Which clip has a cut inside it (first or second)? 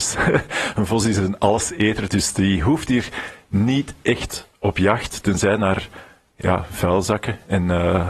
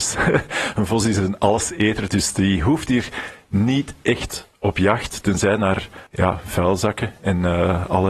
second